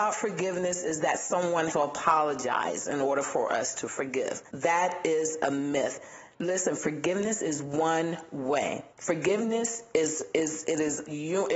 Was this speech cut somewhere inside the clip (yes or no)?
yes